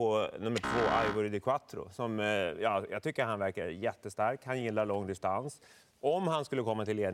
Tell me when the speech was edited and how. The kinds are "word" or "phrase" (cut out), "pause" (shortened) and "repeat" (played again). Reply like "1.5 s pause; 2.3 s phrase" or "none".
none